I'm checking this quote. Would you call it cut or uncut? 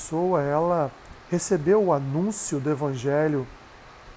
cut